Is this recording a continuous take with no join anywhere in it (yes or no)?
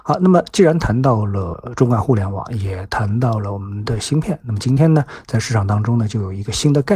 yes